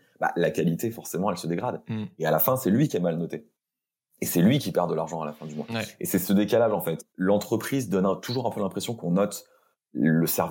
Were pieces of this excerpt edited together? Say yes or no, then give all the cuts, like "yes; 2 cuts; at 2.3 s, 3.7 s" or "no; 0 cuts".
no; 0 cuts